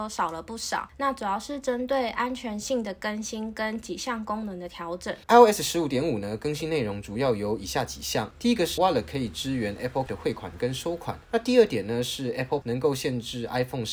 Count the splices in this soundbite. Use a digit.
4